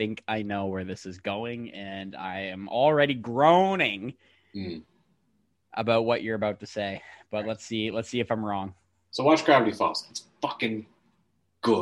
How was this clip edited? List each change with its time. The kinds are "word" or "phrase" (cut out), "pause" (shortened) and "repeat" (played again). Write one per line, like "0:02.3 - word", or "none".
none